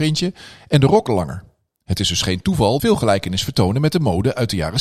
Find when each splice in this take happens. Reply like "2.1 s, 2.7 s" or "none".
1.1 s, 2.8 s